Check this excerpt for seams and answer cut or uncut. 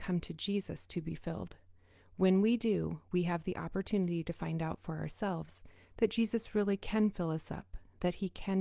uncut